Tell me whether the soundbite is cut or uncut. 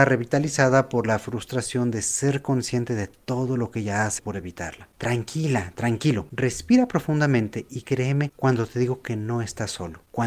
cut